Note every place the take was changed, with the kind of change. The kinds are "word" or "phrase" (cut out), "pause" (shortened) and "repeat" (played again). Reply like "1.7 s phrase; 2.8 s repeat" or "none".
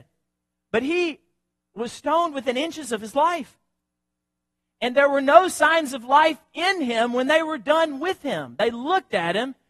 none